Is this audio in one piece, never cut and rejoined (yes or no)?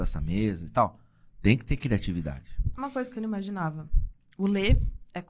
yes